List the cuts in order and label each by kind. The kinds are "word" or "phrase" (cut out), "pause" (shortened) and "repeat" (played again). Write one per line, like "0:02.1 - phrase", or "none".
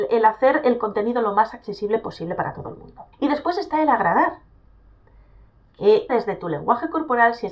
0:03.1 - pause
0:06.1 - word